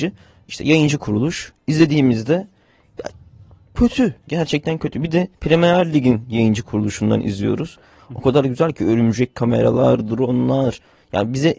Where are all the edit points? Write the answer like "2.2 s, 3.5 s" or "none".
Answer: 5.3 s